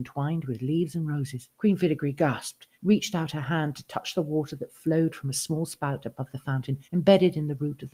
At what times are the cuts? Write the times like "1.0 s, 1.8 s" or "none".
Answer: 1.5 s, 2.7 s, 6.8 s